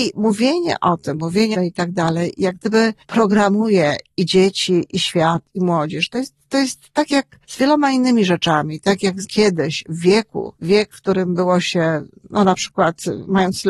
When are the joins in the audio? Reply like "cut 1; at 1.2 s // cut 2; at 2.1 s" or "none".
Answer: cut 1; at 1.5 s // cut 2; at 3.0 s // cut 3; at 7.4 s // cut 4; at 9.2 s // cut 5; at 10.6 s